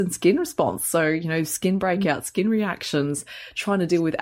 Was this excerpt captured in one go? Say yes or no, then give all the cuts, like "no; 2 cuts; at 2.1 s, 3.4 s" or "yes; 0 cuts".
yes; 0 cuts